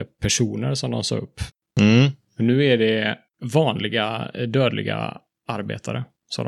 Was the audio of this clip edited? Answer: no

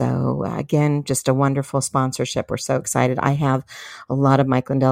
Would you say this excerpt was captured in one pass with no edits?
yes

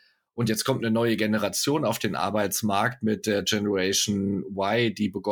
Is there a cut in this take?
no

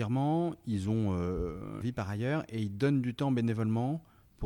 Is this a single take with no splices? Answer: no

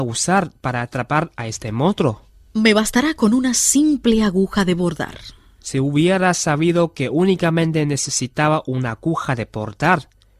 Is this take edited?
no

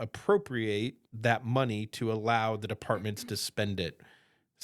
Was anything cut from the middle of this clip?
yes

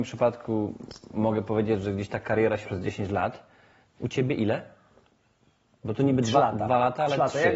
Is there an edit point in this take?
yes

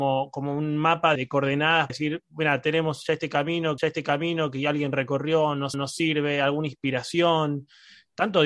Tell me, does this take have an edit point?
yes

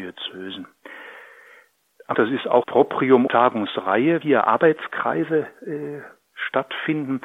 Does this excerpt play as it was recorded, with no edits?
no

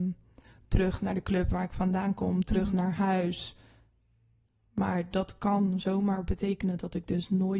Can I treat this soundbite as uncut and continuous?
yes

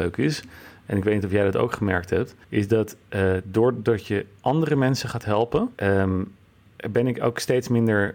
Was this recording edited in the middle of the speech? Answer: yes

